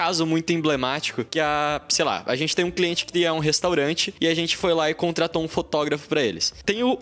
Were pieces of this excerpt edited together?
no; 0 cuts

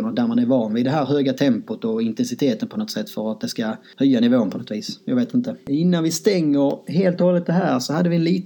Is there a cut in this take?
no; 0 cuts

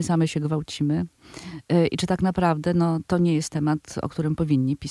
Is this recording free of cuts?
yes; 0 cuts

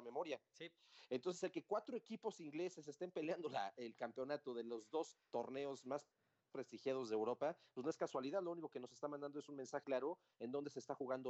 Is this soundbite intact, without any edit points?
no; 3 cuts; at 5.3 s, 6.4 s, 9.8 s

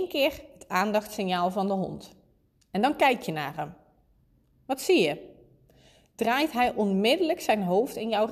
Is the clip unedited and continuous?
yes; 0 cuts

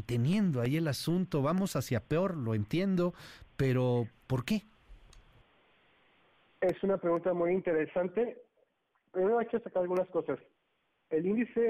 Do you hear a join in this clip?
no; 0 cuts

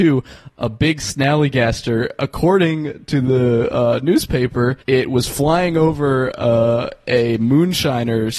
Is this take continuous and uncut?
no; 1 cut; at 4.8 s

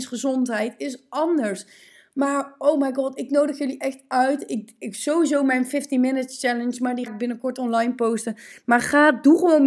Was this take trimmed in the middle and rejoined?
yes; 1 cut; at 7.1 s

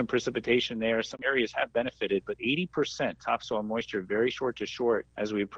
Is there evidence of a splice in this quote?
yes; 1 cut; at 2.4 s

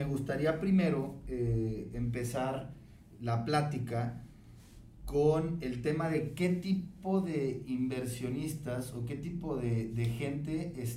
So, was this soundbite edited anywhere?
no; 0 cuts

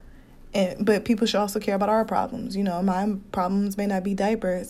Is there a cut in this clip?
no; 0 cuts

